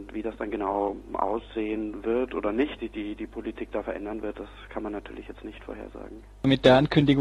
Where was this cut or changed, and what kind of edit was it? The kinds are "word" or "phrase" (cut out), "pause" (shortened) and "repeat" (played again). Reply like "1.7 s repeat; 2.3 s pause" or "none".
2.8 s phrase